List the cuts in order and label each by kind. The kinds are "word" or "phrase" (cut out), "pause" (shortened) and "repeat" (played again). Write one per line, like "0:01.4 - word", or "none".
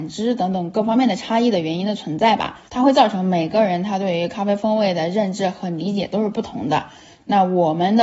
0:02.7 - pause